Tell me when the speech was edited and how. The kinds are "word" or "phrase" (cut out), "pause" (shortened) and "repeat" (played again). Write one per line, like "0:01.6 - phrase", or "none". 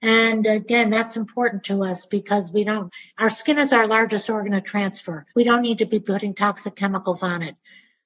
0:05.3 - pause